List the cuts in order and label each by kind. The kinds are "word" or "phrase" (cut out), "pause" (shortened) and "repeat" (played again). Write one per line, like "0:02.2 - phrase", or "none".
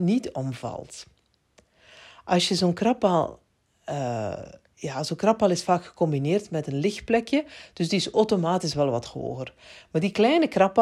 none

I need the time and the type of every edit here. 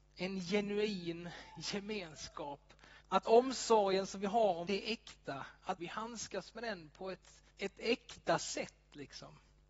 0:03.0 - pause
0:04.7 - word
0:05.8 - phrase
0:07.5 - pause

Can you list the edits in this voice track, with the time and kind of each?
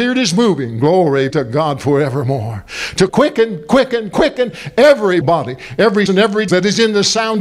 0:01.3 - word
0:03.1 - word
0:04.1 - word
0:05.2 - word
0:06.1 - word
0:06.5 - word

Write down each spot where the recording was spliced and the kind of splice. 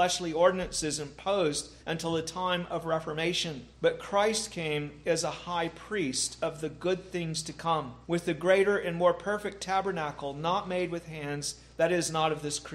0:01.8 - pause
0:03.7 - pause
0:08.0 - pause

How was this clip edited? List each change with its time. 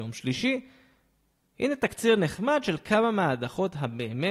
none

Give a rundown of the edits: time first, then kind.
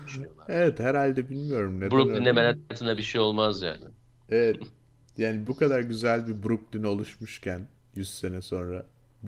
none

